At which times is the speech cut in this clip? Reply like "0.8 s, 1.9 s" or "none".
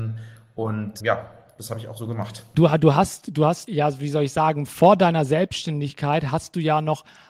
1.0 s